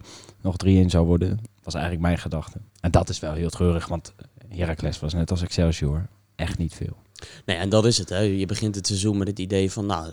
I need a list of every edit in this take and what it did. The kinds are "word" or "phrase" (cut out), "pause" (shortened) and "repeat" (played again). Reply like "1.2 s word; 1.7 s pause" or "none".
2.7 s pause